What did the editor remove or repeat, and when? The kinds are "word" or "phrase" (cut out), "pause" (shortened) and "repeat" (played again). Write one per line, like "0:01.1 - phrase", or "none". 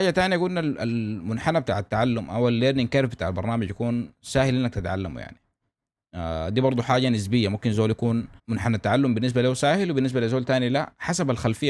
0:08.4 - pause